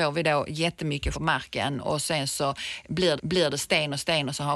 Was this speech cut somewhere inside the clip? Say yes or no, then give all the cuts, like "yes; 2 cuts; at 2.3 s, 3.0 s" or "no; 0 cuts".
yes; 2 cuts; at 1.1 s, 3.2 s